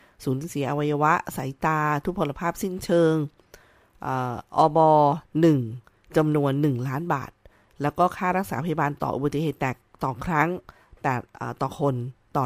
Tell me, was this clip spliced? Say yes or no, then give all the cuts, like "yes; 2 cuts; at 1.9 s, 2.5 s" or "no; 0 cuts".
no; 0 cuts